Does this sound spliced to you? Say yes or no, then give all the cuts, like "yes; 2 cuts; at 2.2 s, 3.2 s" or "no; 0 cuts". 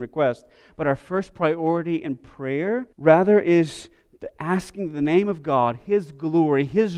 yes; 1 cut; at 2.9 s